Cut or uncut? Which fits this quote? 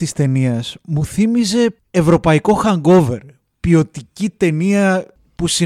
uncut